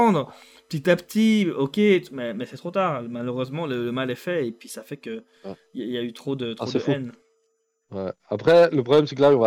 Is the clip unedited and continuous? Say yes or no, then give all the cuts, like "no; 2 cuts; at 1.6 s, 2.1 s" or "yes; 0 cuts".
yes; 0 cuts